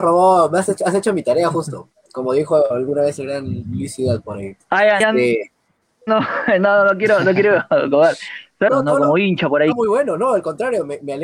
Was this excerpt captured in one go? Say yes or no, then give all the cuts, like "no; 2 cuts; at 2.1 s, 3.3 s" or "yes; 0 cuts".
no; 3 cuts; at 5.0 s, 8.7 s, 9.7 s